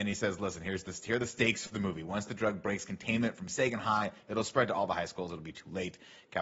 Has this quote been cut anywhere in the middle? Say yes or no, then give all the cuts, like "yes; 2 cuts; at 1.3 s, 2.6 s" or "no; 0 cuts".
no; 0 cuts